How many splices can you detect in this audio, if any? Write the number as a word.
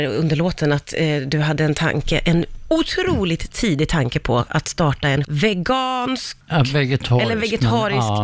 zero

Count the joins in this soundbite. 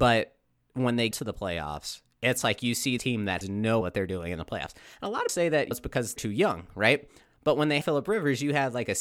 eight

